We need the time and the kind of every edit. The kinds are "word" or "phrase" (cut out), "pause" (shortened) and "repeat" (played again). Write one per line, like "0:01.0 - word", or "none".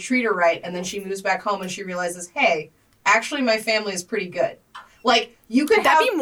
none